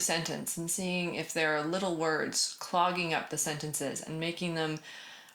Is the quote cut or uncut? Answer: uncut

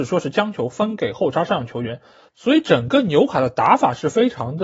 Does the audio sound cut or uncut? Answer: uncut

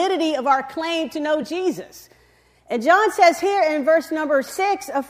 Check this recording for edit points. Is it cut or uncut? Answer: uncut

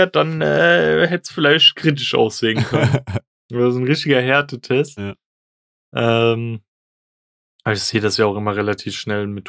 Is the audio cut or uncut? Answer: uncut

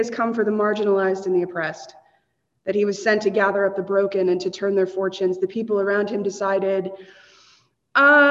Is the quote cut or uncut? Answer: uncut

